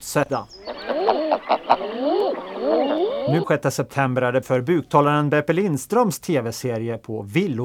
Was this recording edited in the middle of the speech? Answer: yes; 2 cuts; at 3.4 s, 4.4 s

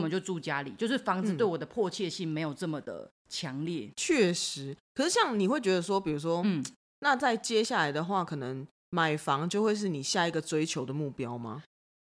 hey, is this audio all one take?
yes; 0 cuts

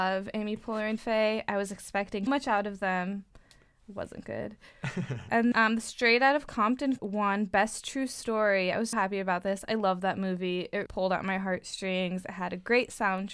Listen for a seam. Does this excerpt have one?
yes; 6 cuts; at 1.0 s, 2.3 s, 5.5 s, 7.0 s, 8.9 s, 10.9 s

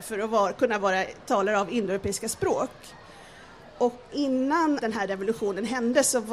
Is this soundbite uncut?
no; 1 cut; at 4.8 s

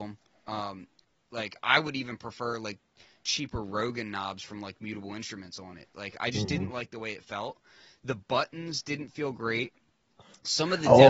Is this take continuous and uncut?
yes; 0 cuts

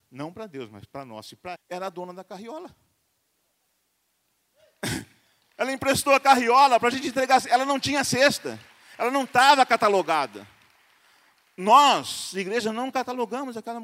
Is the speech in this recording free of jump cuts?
no; 1 cut; at 1.6 s

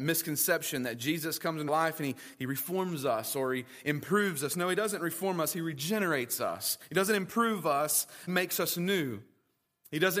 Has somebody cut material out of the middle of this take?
yes; 2 cuts; at 1.7 s, 8.3 s

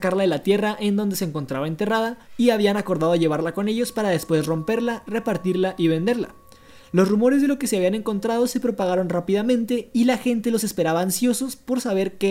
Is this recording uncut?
no; 1 cut; at 2.2 s

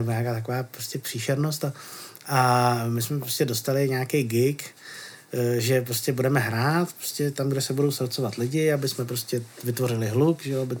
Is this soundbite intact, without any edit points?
yes; 0 cuts

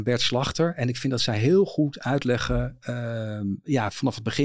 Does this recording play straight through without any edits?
yes; 0 cuts

